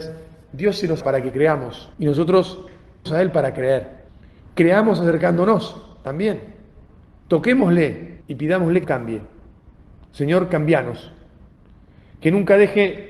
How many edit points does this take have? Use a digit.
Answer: 6